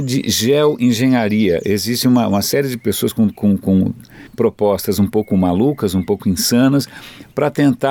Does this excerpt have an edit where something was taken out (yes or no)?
yes